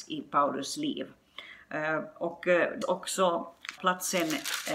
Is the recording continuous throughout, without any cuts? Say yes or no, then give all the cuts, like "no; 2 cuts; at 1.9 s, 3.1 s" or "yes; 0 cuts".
no; 2 cuts; at 2.8 s, 3.8 s